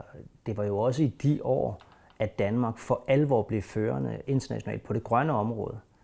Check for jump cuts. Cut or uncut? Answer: uncut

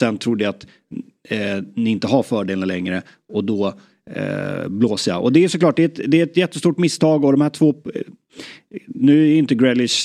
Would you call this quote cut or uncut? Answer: uncut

